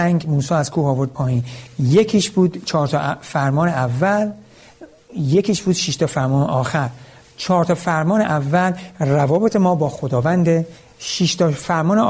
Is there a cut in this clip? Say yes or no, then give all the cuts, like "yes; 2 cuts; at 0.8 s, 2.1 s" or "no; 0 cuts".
no; 0 cuts